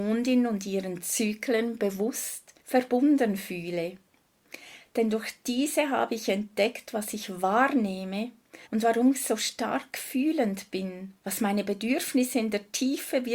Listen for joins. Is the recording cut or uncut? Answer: cut